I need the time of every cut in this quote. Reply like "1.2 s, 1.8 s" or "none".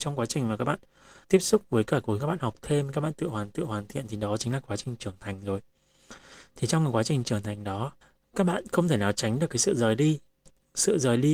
1.2 s, 2.2 s, 3.5 s, 8.0 s